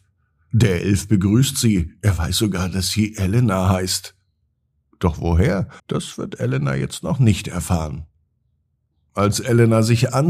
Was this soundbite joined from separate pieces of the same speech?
yes; 1 cut; at 5.8 s

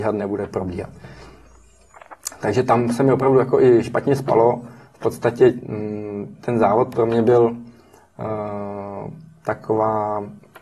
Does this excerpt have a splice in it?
no; 0 cuts

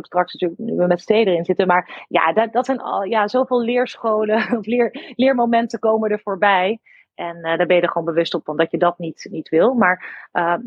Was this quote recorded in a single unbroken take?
yes; 0 cuts

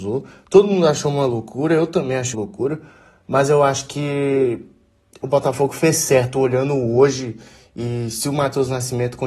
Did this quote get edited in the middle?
yes; 1 cut; at 2.3 s

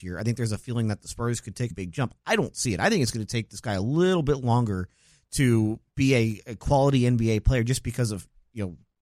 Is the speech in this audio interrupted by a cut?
yes; 1 cut; at 1.7 s

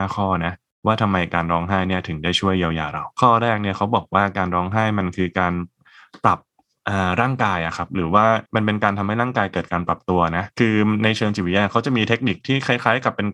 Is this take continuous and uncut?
no; 3 cuts; at 3.1 s, 8.5 s, 10.5 s

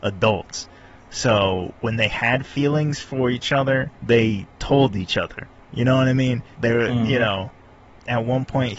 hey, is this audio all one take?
no; 2 cuts; at 3.9 s, 6.5 s

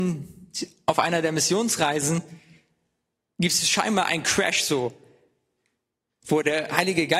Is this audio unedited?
yes; 0 cuts

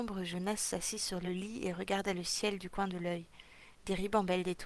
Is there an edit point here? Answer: no; 0 cuts

